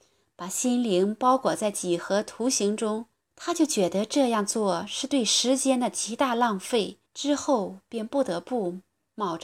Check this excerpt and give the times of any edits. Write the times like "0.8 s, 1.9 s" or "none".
3.1 s, 7.1 s